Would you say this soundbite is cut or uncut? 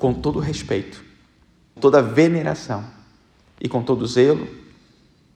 cut